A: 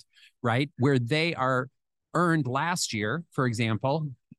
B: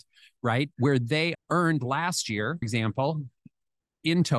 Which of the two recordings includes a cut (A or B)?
B